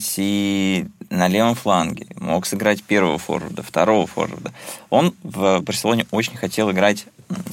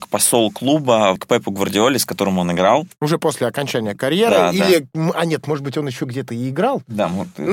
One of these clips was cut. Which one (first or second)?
second